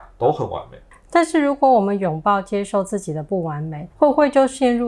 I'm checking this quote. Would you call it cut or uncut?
cut